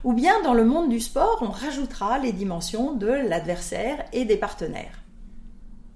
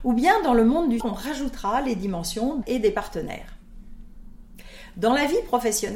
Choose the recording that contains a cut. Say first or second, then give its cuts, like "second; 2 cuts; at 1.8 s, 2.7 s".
second; 2 cuts; at 1.0 s, 2.6 s